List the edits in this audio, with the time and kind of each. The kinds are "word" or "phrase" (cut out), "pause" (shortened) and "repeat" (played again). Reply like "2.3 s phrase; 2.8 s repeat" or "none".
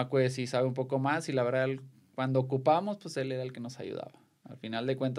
none

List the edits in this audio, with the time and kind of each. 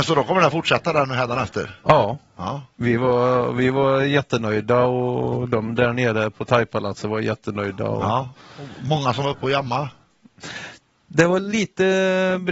none

